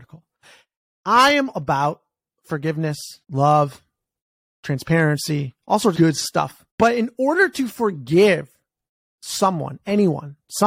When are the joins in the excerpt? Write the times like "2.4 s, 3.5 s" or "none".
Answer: 1.5 s, 3.2 s, 5.6 s, 5.9 s, 6.7 s